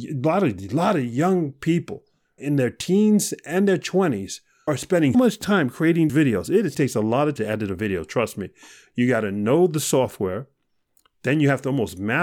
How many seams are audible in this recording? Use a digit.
6